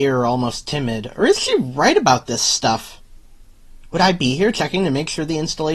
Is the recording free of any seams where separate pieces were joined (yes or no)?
yes